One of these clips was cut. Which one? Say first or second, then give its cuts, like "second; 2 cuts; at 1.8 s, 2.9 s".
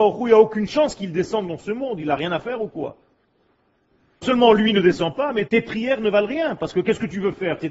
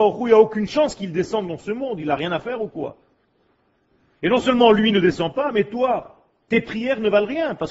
first; 2 cuts; at 4.2 s, 5.5 s